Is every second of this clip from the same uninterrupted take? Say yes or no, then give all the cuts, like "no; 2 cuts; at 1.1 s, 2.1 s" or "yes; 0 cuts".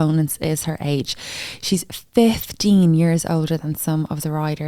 yes; 0 cuts